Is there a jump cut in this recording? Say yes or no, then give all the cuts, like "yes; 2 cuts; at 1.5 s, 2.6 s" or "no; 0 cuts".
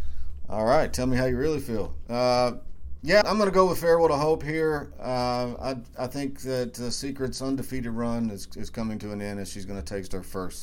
yes; 1 cut; at 3.2 s